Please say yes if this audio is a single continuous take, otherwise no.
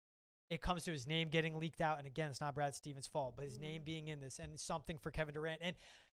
yes